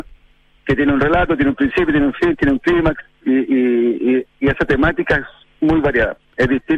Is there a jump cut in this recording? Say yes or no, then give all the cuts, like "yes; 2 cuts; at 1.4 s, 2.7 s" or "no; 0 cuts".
no; 0 cuts